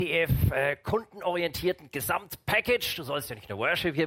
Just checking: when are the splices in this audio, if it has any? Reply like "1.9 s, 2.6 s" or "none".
none